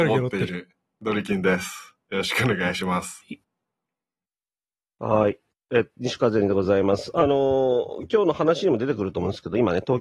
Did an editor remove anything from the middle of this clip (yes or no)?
no